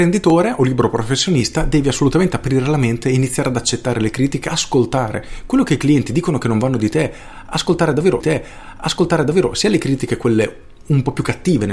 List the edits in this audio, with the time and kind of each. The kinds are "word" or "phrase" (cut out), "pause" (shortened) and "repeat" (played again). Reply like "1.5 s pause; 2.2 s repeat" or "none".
8.2 s repeat